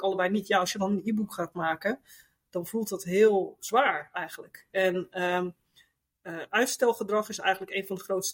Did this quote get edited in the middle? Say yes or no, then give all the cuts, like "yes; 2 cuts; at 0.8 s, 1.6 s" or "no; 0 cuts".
no; 0 cuts